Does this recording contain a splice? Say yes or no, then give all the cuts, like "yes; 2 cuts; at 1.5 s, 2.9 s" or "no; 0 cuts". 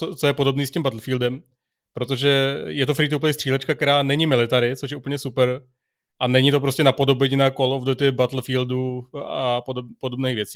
no; 0 cuts